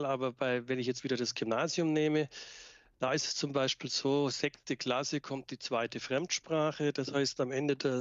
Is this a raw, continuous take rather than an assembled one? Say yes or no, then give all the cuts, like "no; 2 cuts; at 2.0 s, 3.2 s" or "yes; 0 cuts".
yes; 0 cuts